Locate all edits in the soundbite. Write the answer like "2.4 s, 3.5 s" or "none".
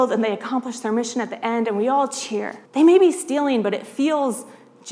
2.7 s